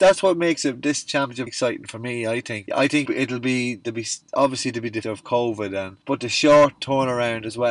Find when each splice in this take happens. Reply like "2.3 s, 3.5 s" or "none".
1.5 s, 2.7 s, 3.0 s, 5.0 s, 6.0 s, 6.8 s